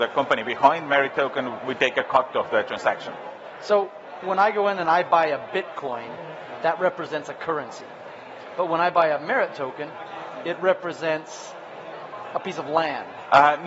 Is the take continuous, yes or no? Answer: yes